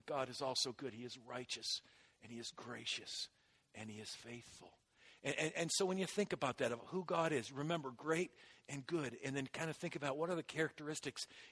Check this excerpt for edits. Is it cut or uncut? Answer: uncut